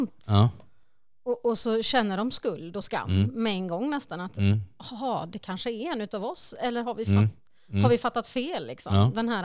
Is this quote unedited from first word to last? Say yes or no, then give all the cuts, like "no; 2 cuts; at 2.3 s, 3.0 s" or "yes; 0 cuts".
yes; 0 cuts